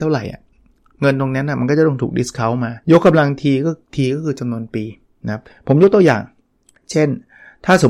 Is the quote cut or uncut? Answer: cut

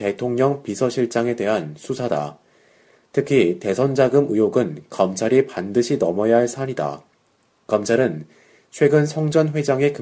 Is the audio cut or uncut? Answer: uncut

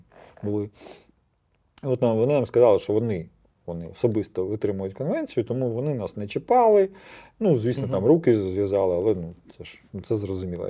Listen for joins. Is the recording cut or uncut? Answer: uncut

